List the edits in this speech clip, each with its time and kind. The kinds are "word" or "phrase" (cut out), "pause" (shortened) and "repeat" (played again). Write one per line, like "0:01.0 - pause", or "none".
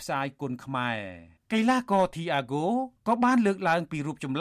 0:01.4 - pause
0:03.0 - pause